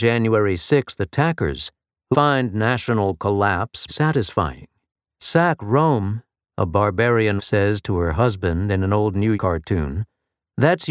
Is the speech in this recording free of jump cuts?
no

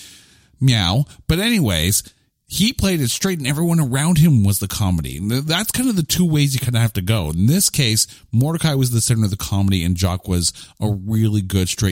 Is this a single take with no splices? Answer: yes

